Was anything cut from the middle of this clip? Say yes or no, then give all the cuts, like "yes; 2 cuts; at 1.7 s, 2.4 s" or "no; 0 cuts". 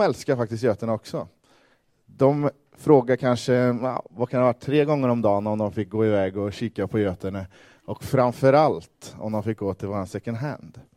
no; 0 cuts